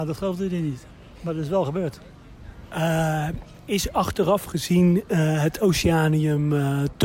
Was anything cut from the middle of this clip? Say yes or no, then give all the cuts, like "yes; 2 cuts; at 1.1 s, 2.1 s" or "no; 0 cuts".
no; 0 cuts